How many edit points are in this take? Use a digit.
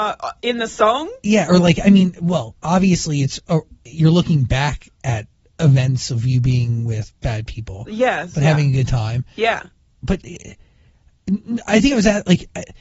0